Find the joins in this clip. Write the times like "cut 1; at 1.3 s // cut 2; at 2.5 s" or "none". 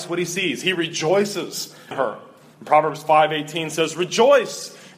cut 1; at 1.9 s